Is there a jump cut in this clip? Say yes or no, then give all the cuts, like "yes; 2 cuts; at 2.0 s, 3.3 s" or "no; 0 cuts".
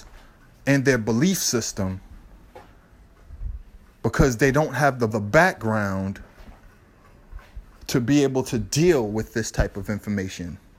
yes; 1 cut; at 5.1 s